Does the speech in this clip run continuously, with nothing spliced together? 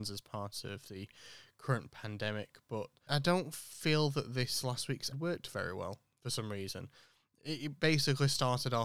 no; 2 cuts; at 3.1 s, 5.1 s

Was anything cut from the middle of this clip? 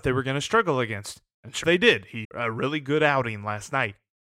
yes; 2 cuts; at 1.6 s, 2.2 s

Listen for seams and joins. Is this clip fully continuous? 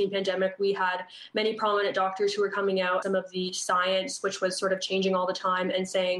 no; 1 cut; at 3.0 s

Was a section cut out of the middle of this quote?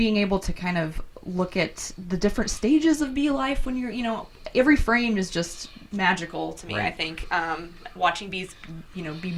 no; 0 cuts

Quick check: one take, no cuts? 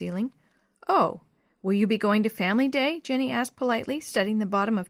yes; 0 cuts

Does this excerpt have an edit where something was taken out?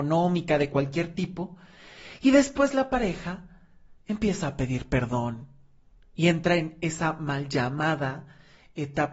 yes; 1 cut; at 4.0 s

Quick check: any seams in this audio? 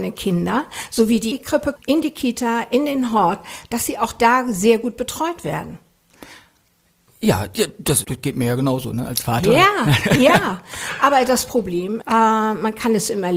yes; 4 cuts; at 1.3 s, 1.8 s, 8.0 s, 12.0 s

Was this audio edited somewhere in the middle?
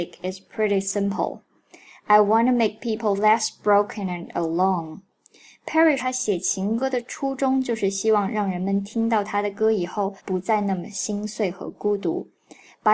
yes; 3 cuts; at 3.2 s, 6.0 s, 10.2 s

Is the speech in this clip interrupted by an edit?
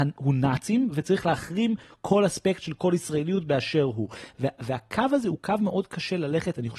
no; 0 cuts

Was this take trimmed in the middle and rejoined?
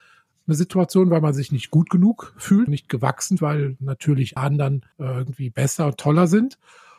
yes; 4 cuts; at 2.7 s, 3.4 s, 4.4 s, 4.9 s

